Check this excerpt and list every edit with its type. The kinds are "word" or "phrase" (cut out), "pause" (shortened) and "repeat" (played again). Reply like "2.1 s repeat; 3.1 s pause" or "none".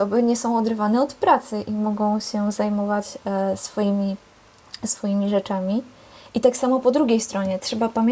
none